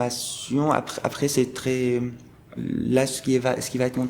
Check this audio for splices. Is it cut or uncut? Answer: cut